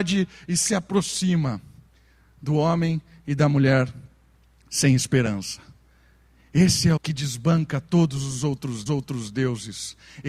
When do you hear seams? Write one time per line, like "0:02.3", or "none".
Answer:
0:07.0
0:08.9